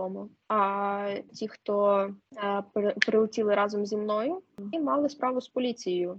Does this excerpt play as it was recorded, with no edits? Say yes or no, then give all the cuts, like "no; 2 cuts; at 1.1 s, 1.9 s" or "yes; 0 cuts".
no; 2 cuts; at 1.3 s, 4.7 s